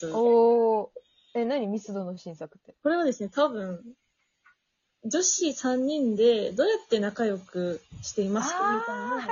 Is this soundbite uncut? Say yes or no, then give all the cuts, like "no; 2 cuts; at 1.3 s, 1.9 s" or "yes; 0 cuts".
yes; 0 cuts